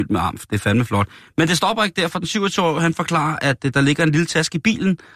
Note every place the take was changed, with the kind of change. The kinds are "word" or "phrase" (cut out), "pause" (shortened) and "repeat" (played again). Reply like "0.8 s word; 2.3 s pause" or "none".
none